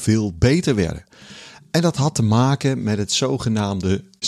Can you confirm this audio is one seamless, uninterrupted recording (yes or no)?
yes